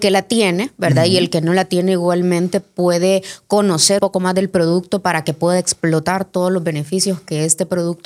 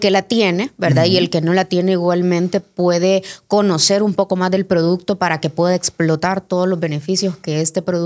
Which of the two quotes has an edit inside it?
first; 1 cut; at 4.0 s

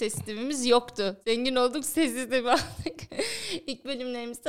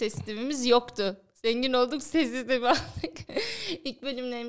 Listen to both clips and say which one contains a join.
first; 1 cut; at 1.2 s

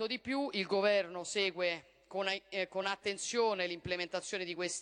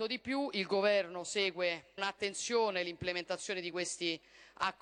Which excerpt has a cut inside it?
second; 1 cut; at 2.0 s

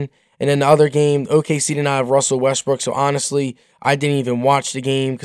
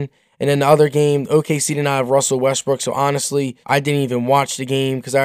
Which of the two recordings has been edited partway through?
second; 1 cut; at 3.6 s

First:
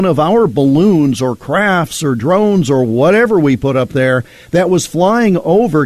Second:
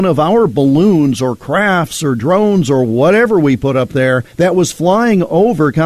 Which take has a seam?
second; 1 cut; at 4.3 s

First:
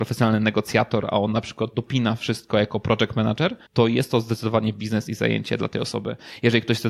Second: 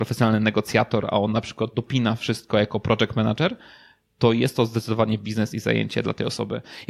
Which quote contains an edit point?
first; 1 cut; at 3.7 s

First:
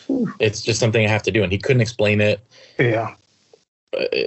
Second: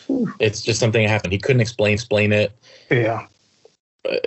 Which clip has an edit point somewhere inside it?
second; 2 cuts; at 1.2 s, 1.9 s

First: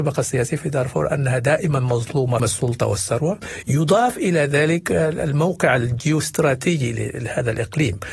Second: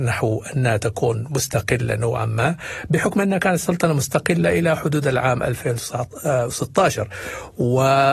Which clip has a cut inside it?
first; 1 cut; at 2.4 s

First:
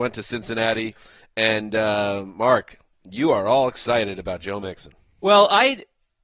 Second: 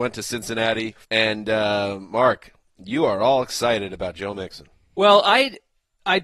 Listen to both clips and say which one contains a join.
second; 1 cut; at 1.0 s

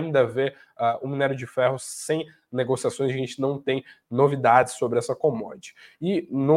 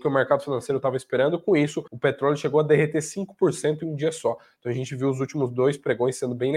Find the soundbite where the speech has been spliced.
second; 1 cut; at 1.9 s

